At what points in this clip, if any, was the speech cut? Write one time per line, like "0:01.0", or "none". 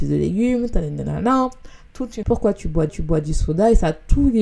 0:02.2
0:02.9

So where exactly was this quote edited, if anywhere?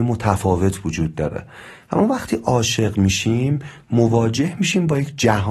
none

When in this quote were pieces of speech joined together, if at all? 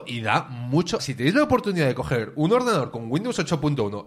0:01.0

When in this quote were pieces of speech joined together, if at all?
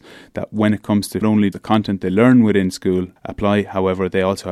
0:01.2
0:01.5
0:03.2

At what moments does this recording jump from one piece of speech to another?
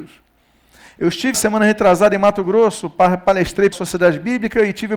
0:01.3
0:03.7

